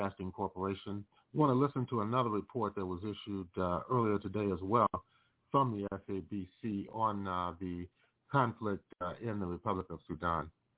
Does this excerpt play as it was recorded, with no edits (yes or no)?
no